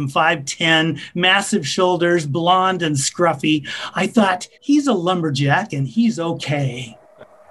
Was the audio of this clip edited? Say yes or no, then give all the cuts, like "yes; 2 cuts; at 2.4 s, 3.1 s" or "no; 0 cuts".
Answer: yes; 1 cut; at 4.5 s